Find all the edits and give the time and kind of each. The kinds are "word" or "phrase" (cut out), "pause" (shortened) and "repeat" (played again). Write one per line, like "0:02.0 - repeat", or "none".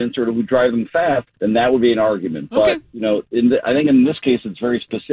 0:01.3 - pause